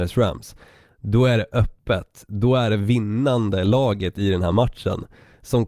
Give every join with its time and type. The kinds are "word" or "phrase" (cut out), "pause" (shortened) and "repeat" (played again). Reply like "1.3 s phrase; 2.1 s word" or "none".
none